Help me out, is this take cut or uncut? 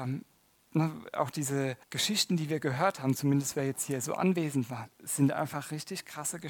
cut